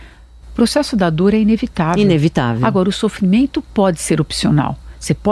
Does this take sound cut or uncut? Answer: uncut